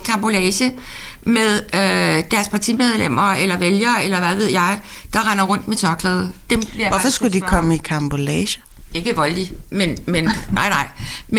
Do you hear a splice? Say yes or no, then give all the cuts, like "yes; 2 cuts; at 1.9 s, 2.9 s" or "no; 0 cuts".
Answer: no; 0 cuts